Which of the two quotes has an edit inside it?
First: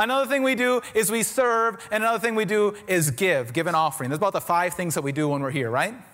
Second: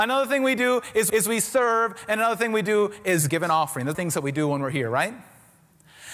second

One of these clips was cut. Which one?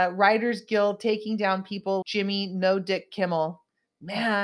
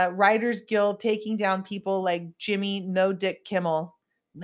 first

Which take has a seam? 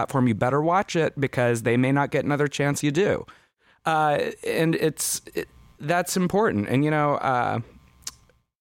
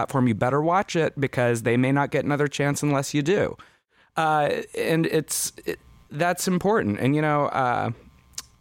first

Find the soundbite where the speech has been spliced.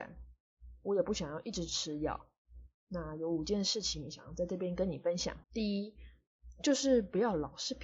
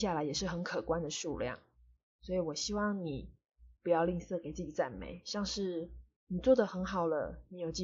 first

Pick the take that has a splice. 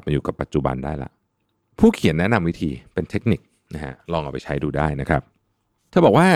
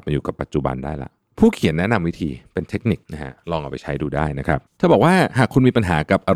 second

